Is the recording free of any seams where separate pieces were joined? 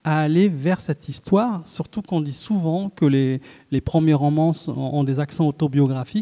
yes; 0 cuts

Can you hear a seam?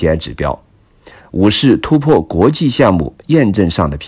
no; 0 cuts

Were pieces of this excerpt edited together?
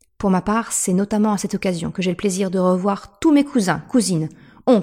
no; 0 cuts

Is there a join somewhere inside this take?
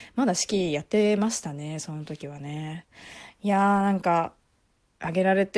no; 0 cuts

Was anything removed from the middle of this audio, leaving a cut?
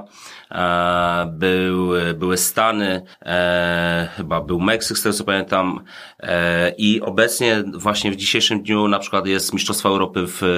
yes; 1 cut; at 3.1 s

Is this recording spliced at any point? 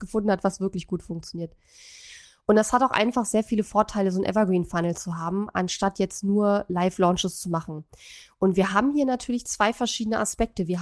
no; 0 cuts

